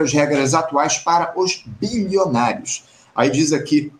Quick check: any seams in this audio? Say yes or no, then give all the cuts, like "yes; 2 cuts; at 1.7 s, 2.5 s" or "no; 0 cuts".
no; 0 cuts